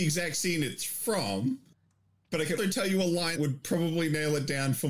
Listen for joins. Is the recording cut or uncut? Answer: cut